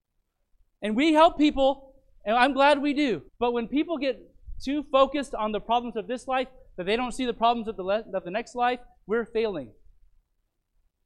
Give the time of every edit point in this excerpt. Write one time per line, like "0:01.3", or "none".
0:03.3